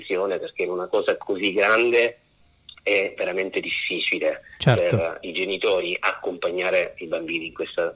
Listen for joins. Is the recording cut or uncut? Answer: uncut